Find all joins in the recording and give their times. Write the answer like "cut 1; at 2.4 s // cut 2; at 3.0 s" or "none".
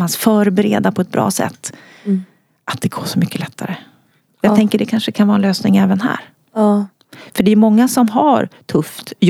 none